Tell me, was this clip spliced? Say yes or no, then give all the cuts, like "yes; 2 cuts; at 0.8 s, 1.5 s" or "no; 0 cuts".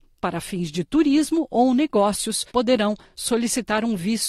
yes; 1 cut; at 2.5 s